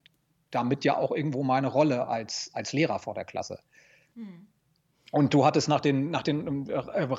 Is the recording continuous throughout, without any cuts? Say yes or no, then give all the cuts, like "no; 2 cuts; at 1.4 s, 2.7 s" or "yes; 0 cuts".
yes; 0 cuts